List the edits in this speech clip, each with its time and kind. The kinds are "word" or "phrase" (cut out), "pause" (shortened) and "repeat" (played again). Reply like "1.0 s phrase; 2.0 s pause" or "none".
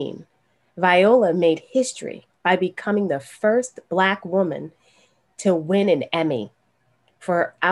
none